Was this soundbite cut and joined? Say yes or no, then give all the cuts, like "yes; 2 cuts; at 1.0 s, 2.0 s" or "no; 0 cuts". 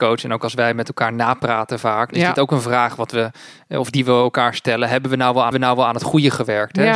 yes; 2 cuts; at 2.1 s, 5.5 s